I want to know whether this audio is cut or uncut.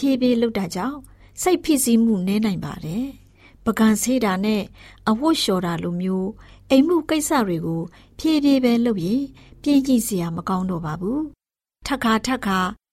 uncut